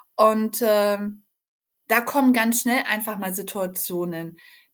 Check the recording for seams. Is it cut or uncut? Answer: uncut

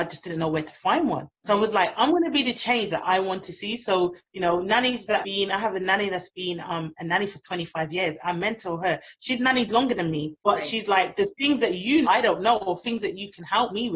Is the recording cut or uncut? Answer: cut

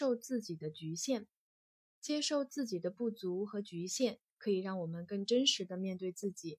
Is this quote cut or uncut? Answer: uncut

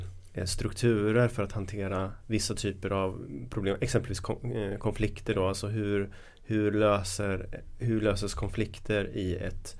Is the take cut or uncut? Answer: uncut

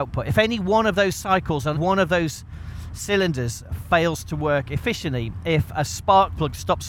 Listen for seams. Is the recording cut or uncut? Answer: cut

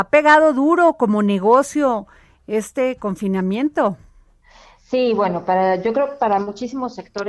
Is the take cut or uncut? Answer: uncut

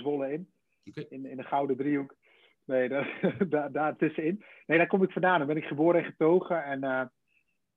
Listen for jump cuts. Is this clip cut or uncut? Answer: uncut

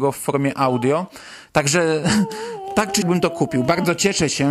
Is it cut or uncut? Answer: cut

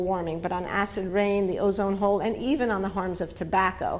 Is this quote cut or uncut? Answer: uncut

